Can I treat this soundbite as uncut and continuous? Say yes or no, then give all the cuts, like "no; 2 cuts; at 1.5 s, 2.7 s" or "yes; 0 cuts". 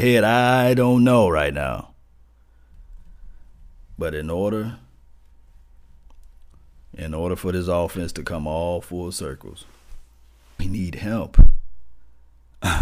no; 1 cut; at 10.6 s